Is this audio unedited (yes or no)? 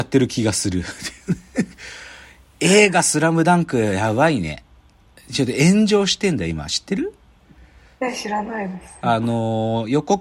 yes